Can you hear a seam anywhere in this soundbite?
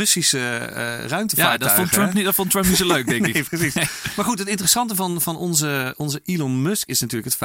no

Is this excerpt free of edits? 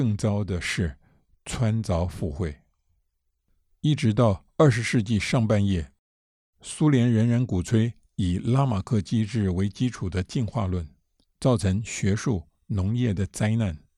yes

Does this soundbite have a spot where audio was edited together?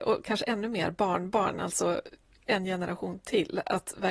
no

